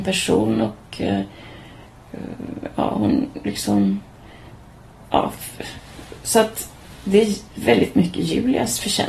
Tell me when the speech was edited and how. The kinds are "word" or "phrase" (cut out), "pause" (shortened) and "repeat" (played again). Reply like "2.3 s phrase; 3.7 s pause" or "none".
4.5 s pause